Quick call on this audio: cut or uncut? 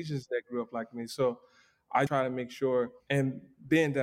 cut